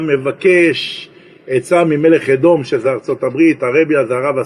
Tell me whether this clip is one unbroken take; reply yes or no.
yes